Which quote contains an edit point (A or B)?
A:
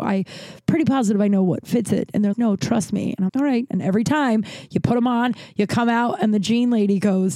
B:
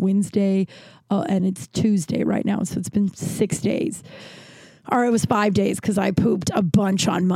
A